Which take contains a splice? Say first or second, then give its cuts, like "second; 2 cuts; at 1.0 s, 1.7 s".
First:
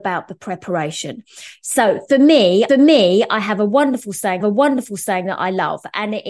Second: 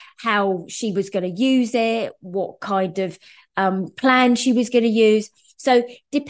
first; 2 cuts; at 2.7 s, 4.4 s